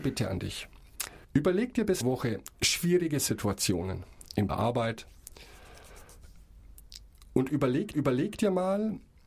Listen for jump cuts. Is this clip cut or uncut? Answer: cut